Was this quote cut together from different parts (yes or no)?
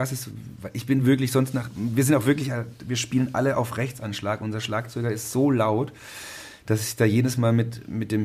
no